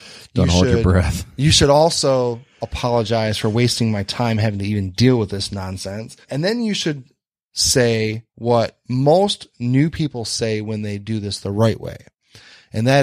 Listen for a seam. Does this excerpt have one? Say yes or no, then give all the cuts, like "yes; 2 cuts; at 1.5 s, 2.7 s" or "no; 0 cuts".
yes; 2 cuts; at 6.2 s, 8.3 s